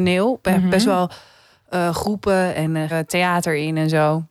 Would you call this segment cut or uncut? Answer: cut